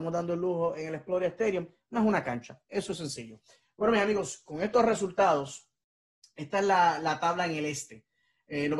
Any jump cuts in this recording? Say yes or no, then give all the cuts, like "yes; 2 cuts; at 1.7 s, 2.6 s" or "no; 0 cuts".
no; 0 cuts